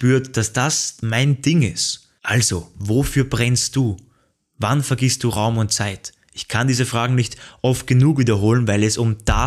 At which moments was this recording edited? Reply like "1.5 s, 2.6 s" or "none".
2.2 s